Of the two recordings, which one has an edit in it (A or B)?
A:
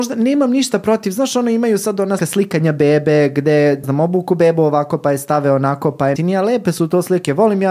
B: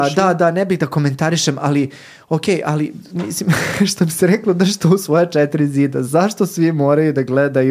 A